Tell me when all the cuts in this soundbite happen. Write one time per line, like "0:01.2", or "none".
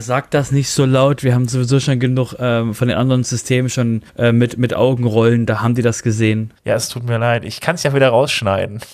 0:04.1
0:06.6